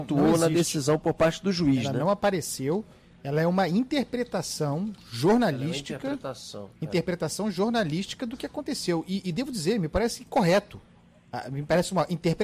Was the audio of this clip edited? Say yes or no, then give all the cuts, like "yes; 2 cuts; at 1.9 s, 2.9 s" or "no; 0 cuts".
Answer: no; 0 cuts